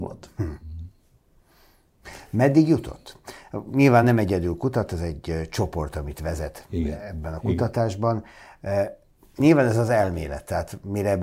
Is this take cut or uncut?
uncut